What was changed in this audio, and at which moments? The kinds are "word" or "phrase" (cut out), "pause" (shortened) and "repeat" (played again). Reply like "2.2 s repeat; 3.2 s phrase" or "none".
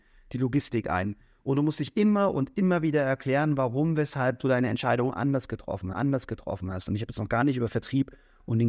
5.9 s repeat